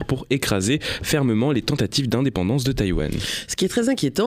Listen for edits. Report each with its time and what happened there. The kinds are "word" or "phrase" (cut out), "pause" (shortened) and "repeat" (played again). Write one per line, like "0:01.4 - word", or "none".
none